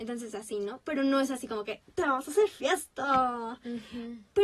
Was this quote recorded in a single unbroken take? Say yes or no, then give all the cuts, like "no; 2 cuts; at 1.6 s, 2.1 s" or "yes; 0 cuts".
yes; 0 cuts